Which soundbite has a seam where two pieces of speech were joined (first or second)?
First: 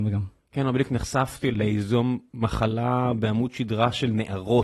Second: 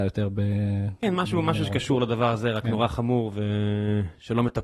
first